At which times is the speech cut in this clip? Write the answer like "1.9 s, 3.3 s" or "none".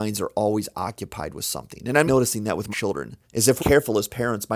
2.1 s, 2.7 s, 3.2 s, 3.6 s